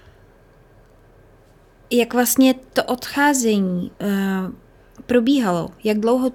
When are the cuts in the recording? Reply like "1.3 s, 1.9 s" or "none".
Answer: 3.9 s